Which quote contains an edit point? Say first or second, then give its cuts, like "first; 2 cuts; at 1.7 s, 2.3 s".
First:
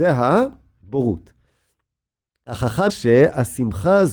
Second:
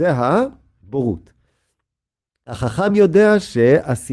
first; 1 cut; at 2.9 s